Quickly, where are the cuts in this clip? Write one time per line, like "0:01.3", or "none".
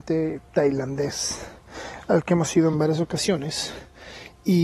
none